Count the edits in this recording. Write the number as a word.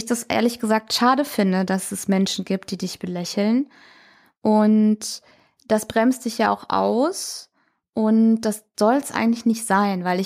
zero